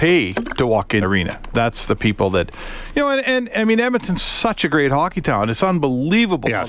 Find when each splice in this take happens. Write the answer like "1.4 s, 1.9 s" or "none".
1.0 s